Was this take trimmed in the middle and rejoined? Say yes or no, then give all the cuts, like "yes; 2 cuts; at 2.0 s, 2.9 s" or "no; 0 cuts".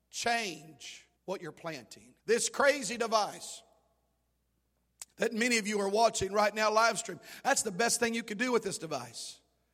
yes; 3 cuts; at 1.2 s, 2.2 s, 5.1 s